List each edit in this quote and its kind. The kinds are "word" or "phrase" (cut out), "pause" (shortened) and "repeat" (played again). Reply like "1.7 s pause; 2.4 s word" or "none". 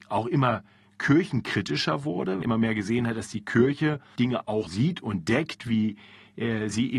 2.4 s phrase; 4.2 s word; 4.7 s word